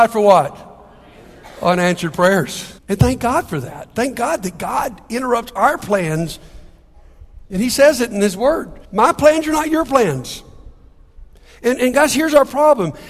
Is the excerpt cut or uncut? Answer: cut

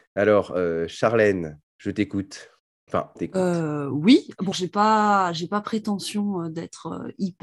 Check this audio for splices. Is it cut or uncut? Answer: cut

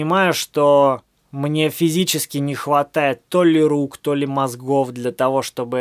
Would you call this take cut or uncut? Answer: uncut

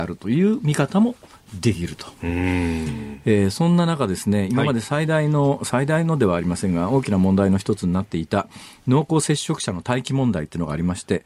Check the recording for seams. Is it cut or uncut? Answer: uncut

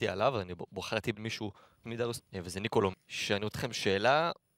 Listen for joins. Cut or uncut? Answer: cut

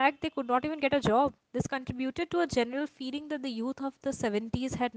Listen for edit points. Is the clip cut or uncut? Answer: cut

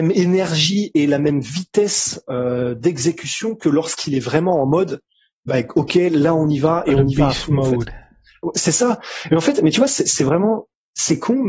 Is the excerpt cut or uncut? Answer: uncut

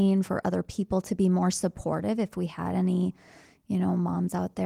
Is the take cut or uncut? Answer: uncut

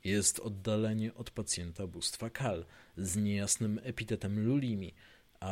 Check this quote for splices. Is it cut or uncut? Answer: uncut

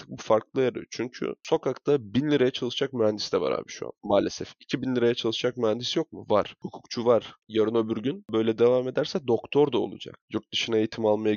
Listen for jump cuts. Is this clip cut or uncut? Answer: uncut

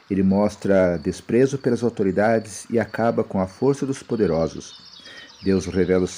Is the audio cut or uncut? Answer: uncut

